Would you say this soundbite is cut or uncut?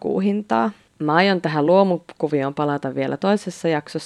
uncut